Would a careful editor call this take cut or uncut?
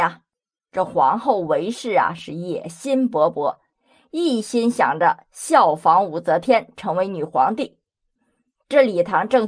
uncut